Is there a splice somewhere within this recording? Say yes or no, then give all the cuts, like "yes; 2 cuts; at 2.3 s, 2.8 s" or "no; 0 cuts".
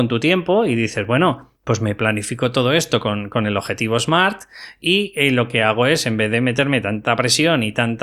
yes; 1 cut; at 1.5 s